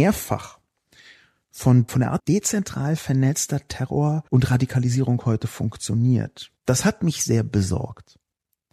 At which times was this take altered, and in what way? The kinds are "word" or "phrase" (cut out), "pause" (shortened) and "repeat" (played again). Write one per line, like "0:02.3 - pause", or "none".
0:01.9 - word
0:02.2 - phrase
0:04.3 - pause
0:06.6 - pause